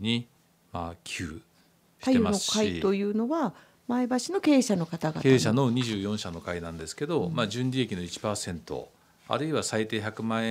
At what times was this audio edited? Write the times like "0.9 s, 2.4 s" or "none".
none